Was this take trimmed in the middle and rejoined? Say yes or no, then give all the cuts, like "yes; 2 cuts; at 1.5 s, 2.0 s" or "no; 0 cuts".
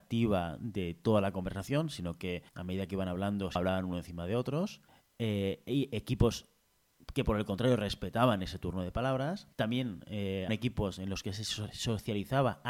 yes; 5 cuts; at 2.5 s, 3.6 s, 4.9 s, 9.5 s, 10.5 s